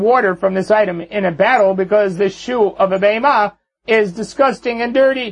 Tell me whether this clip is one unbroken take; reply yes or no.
yes